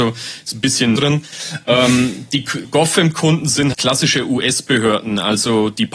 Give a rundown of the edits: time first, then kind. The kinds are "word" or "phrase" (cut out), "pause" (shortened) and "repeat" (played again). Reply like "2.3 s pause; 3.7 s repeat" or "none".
1.0 s word; 2.6 s word; 3.7 s word